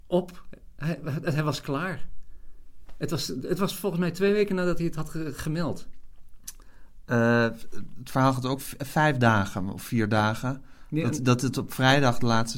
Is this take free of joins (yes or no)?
yes